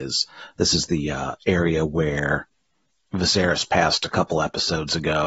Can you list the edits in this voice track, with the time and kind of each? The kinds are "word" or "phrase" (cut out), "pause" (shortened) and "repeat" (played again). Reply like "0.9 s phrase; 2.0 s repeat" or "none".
none